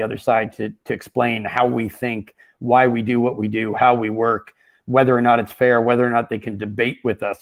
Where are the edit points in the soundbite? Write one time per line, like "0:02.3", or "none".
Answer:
none